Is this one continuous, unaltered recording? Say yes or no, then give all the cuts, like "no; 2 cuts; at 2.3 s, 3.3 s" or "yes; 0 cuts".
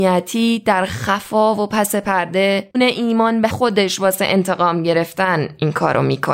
no; 2 cuts; at 2.7 s, 3.5 s